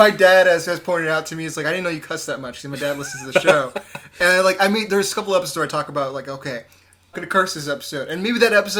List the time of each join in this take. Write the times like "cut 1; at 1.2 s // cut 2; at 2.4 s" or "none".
cut 1; at 7.1 s